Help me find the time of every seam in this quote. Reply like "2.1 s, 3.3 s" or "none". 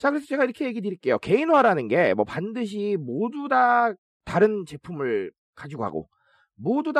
none